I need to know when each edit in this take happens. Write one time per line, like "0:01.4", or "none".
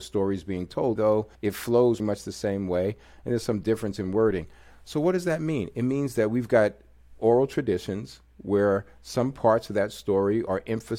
0:01.0
0:01.3
0:02.0